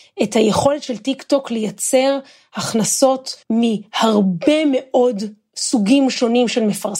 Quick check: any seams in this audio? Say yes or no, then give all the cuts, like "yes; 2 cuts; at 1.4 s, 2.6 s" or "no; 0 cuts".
yes; 1 cut; at 3.4 s